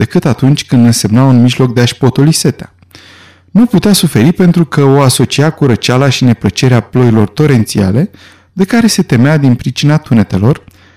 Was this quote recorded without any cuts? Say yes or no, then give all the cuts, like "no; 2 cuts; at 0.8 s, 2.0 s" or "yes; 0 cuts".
yes; 0 cuts